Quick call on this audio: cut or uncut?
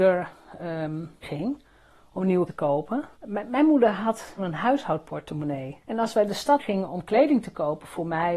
cut